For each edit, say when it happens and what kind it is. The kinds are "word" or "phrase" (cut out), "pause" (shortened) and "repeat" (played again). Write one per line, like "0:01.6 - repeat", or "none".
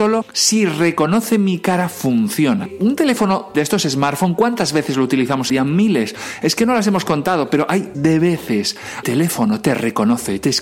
0:03.5 - word
0:05.5 - word
0:07.9 - word
0:09.0 - phrase